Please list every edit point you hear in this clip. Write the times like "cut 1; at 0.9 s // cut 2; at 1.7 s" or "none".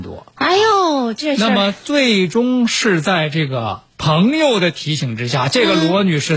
none